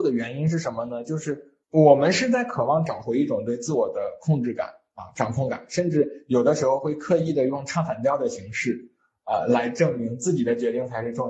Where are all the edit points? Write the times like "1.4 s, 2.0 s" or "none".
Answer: 1.6 s